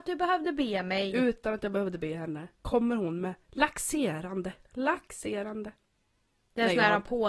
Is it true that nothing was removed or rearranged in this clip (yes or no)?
no